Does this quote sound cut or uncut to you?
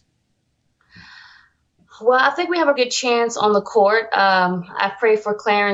cut